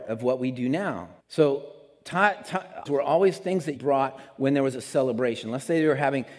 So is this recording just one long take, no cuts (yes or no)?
no